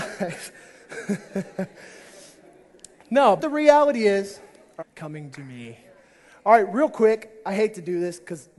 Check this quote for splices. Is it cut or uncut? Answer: cut